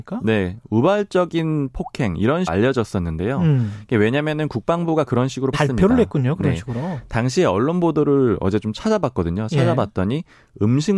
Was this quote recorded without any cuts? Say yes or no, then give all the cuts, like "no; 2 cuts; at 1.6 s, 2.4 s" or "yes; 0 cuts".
no; 2 cuts; at 2.5 s, 5.5 s